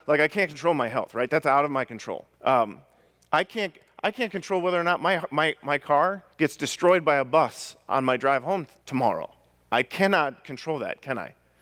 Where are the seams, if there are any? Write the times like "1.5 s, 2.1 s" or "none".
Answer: 2.3 s, 6.3 s, 8.8 s